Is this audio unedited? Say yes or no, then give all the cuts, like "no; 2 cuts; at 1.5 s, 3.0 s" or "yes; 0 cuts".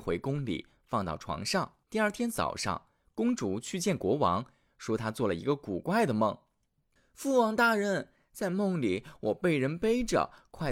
no; 1 cut; at 1.8 s